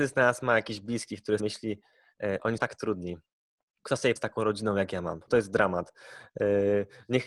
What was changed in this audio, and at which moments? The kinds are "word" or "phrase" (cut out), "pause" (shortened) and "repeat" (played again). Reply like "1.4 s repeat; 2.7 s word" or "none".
1.4 s word; 2.6 s word; 3.8 s word; 4.2 s word; 5.3 s word